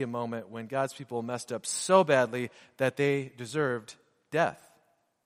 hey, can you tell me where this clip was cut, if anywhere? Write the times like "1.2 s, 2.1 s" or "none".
none